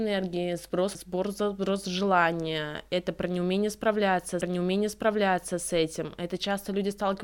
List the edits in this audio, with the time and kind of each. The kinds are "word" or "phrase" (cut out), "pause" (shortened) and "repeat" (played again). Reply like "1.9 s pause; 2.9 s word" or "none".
0.9 s word; 4.4 s repeat